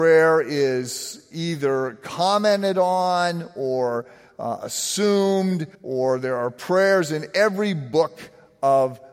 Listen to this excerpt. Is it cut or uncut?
cut